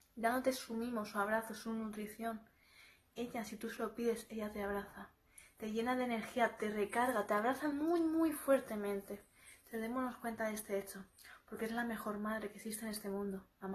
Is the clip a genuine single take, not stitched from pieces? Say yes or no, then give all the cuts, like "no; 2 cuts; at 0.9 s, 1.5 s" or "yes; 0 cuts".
yes; 0 cuts